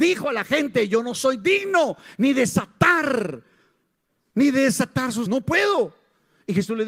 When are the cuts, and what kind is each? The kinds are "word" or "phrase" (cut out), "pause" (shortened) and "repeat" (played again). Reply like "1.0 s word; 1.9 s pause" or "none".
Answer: 5.3 s word

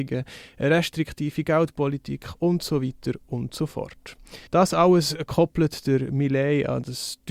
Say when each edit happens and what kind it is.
4.5 s pause

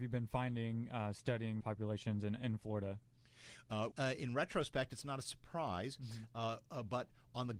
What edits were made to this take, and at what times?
1.6 s word; 3.9 s word

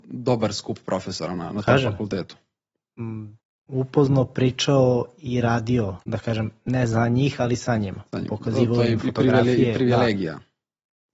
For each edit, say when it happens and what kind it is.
3.4 s pause; 6.0 s pause

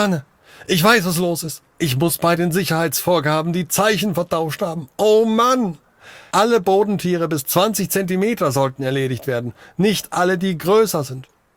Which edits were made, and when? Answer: none

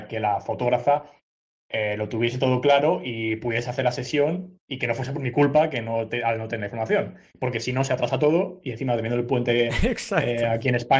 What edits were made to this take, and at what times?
none

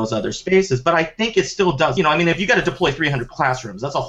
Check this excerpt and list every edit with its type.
2.0 s phrase

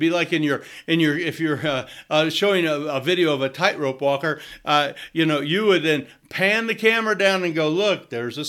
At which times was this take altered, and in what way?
none

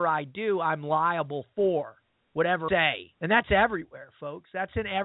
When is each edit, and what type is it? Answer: 2.7 s word

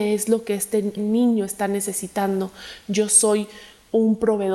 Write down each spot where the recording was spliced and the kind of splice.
1.0 s word

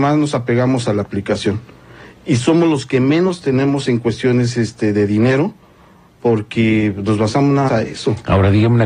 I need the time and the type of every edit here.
7.7 s word

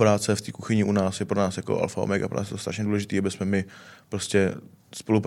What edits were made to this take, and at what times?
none

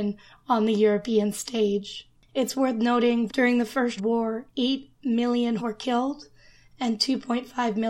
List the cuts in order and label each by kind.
3.3 s word; 4.0 s word; 4.5 s pause; 5.6 s word

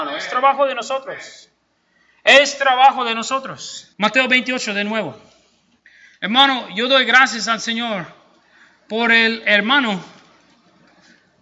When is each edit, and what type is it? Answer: 3.9 s pause; 5.8 s pause

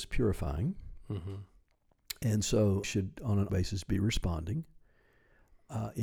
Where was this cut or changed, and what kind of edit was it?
2.8 s phrase; 3.5 s word

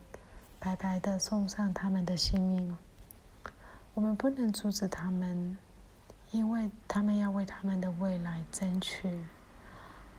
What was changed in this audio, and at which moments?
3.9 s pause; 6.8 s pause

